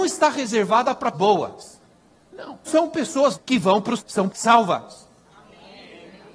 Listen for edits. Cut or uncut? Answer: cut